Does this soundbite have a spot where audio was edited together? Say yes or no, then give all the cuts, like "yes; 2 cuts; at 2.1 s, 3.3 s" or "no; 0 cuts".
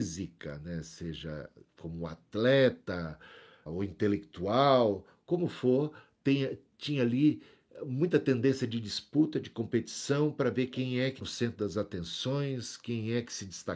yes; 2 cuts; at 3.7 s, 11.2 s